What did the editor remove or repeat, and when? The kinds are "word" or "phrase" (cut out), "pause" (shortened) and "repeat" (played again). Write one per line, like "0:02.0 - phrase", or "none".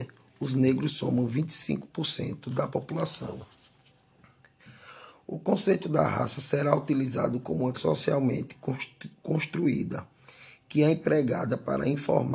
0:07.7 - word